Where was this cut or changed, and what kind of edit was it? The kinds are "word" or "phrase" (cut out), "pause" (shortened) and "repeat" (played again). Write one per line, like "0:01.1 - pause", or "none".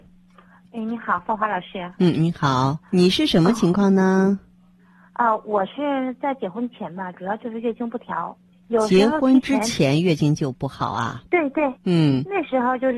0:02.8 - pause
0:08.5 - pause
0:11.3 - pause
0:11.8 - pause